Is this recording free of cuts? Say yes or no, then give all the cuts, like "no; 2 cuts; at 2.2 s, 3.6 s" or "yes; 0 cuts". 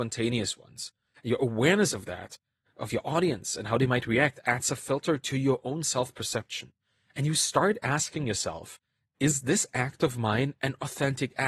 yes; 0 cuts